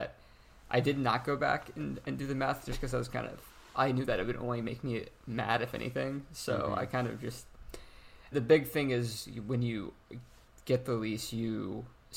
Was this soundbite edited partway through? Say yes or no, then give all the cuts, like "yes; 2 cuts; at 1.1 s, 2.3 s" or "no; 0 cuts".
yes; 1 cut; at 8.3 s